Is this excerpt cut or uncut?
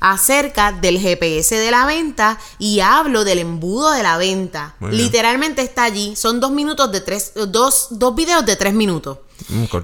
uncut